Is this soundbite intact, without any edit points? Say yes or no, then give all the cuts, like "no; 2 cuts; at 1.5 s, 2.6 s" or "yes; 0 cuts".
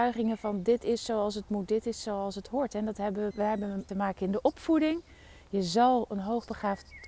no; 2 cuts; at 3.3 s, 3.9 s